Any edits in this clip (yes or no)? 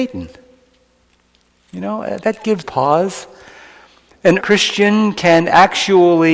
yes